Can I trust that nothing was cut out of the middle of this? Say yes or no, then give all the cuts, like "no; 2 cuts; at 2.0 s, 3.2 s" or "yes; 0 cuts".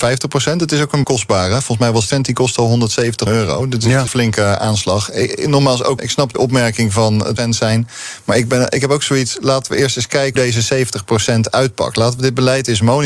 no; 8 cuts; at 1.0 s, 2.1 s, 3.3 s, 4.1 s, 6.0 s, 6.3 s, 7.4 s, 10.4 s